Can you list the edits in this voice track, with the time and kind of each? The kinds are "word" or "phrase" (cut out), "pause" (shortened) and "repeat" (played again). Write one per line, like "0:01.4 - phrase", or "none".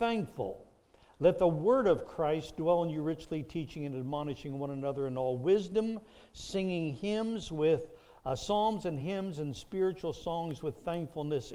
none